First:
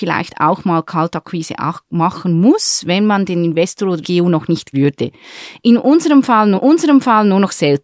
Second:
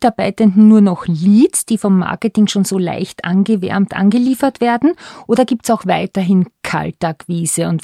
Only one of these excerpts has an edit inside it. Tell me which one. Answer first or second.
first